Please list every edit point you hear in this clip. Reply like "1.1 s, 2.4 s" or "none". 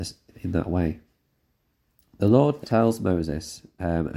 2.6 s